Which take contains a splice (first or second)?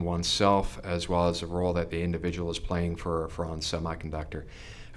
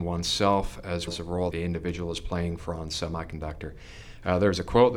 second